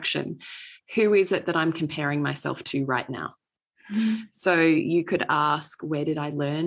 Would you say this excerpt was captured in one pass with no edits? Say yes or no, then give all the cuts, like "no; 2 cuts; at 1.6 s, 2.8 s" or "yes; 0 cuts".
yes; 0 cuts